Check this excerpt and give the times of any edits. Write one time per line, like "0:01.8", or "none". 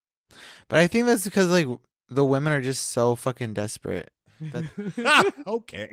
none